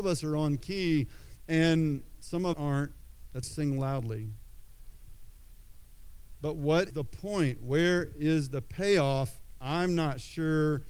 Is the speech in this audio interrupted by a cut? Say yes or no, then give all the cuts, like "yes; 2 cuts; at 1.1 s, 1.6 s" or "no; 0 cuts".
yes; 3 cuts; at 2.5 s, 3.4 s, 6.9 s